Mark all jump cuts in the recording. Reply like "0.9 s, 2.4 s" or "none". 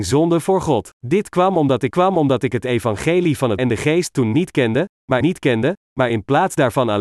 1.0 s, 1.9 s, 3.6 s, 5.2 s

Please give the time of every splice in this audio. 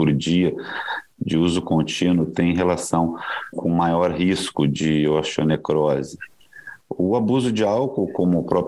3.5 s

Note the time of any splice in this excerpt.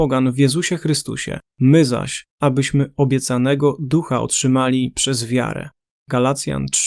1.5 s, 2.3 s, 5.8 s

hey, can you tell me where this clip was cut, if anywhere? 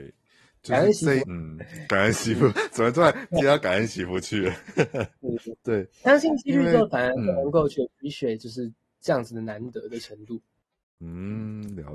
1.2 s, 2.5 s

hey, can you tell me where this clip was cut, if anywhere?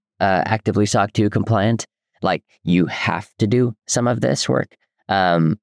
none

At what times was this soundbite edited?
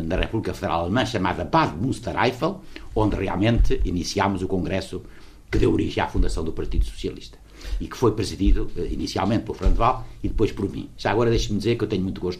none

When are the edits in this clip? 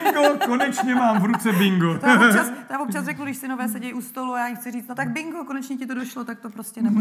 none

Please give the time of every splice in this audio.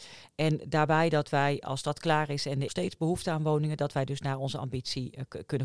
2.7 s

